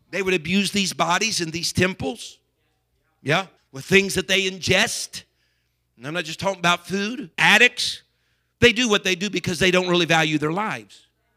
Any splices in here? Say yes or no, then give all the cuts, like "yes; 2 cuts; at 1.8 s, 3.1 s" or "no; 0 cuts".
yes; 2 cuts; at 3.6 s, 7.3 s